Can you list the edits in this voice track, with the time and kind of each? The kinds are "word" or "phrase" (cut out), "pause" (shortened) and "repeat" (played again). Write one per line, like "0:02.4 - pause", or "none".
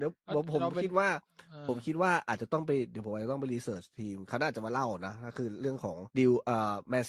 0:06.1 - pause

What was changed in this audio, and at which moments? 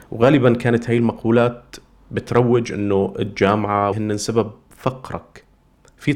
0:03.9 - word

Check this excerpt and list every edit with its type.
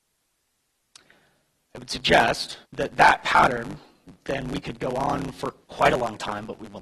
0:02.6 - pause
0:05.6 - pause

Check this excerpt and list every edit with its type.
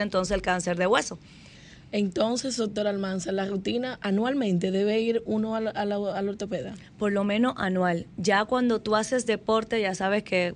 none

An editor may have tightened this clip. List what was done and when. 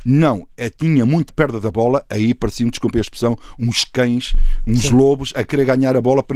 0:01.3 - phrase

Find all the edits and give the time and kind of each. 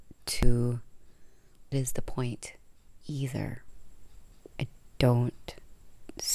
0:01.7 - word
0:03.0 - pause

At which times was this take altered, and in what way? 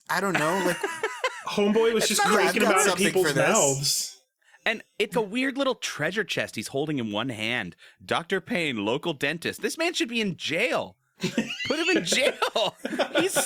0:05.1 - word

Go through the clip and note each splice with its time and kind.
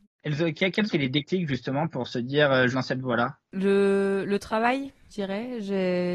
0:00.9 - word
0:02.7 - word
0:03.4 - pause
0:05.1 - word

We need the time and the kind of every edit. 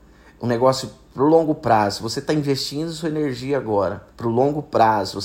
0:04.1 - pause

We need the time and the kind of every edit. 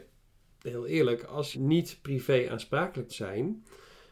0:01.5 - word
0:03.1 - word

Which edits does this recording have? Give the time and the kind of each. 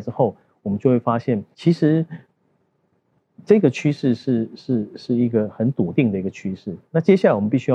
0:01.5 - pause

